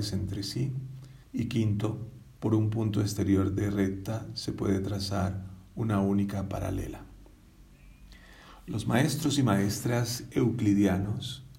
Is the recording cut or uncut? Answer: cut